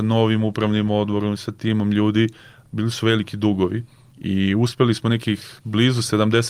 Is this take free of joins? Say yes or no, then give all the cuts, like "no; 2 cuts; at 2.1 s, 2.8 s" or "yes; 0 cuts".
yes; 0 cuts